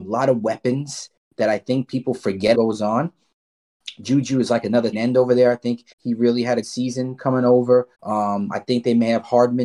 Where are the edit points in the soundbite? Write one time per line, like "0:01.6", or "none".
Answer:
0:02.5
0:04.9
0:05.9
0:06.6
0:07.9